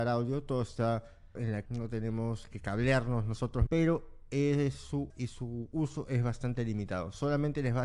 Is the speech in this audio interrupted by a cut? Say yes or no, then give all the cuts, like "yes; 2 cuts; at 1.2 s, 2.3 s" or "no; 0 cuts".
yes; 4 cuts; at 1.3 s, 1.6 s, 3.7 s, 5.1 s